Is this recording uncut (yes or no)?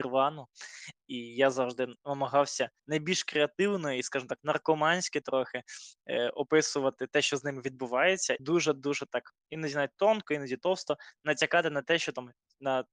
no